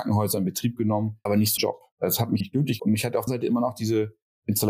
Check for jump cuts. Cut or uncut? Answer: cut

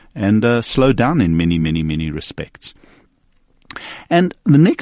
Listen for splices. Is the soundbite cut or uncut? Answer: uncut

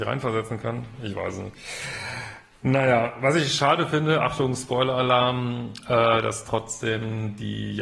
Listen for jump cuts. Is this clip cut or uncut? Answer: uncut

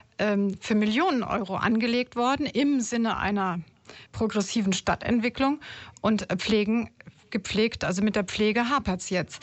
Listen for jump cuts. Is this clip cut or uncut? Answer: cut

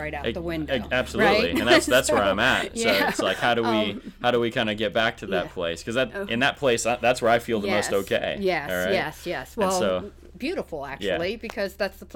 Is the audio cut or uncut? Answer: uncut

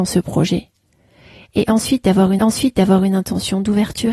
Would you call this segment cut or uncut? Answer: cut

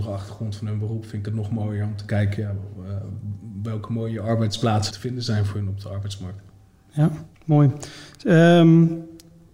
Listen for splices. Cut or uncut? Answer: cut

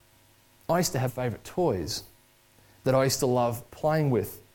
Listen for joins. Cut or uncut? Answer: cut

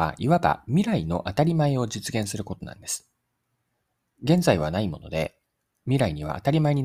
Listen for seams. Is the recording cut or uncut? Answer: uncut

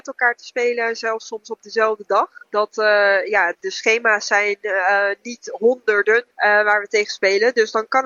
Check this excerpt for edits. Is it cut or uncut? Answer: cut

